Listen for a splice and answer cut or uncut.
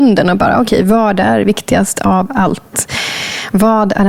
uncut